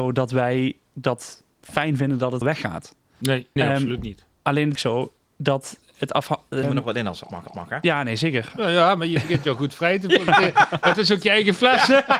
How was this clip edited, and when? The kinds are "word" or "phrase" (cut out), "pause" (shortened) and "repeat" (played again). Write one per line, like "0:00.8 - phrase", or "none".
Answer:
0:02.4 - phrase
0:03.6 - word
0:04.8 - phrase
0:06.6 - word
0:07.5 - repeat